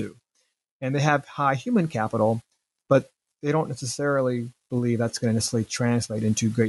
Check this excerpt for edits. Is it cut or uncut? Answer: uncut